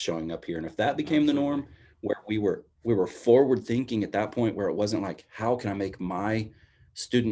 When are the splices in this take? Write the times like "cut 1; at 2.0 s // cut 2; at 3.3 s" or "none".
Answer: none